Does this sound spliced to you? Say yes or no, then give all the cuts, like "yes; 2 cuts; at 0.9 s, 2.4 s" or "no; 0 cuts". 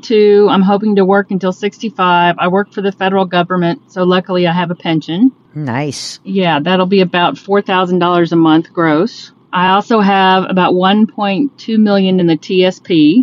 no; 0 cuts